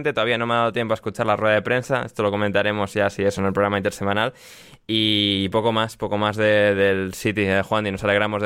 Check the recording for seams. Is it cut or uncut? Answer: uncut